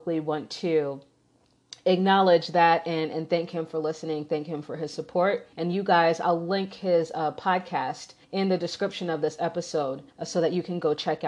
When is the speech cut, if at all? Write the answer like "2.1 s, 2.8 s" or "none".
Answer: 5.5 s, 8.2 s, 10.1 s